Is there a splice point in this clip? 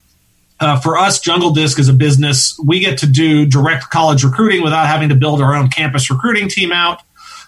no; 0 cuts

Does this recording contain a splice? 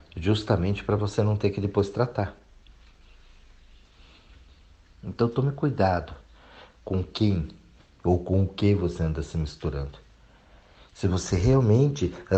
no; 0 cuts

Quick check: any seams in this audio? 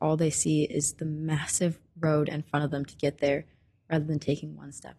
no; 0 cuts

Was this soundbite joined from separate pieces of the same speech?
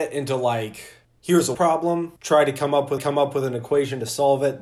yes; 4 cuts; at 1.0 s, 1.5 s, 2.2 s, 3.0 s

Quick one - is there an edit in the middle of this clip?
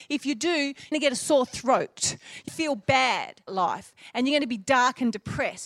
yes; 3 cuts; at 0.9 s, 2.5 s, 3.5 s

